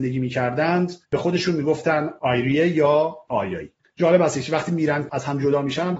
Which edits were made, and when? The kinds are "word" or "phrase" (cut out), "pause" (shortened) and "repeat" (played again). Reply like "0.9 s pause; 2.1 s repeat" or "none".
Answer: 1.0 s pause; 3.8 s pause